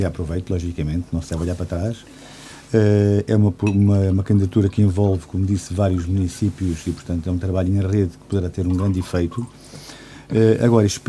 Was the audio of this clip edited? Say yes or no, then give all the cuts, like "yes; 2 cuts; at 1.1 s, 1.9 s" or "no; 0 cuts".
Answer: no; 0 cuts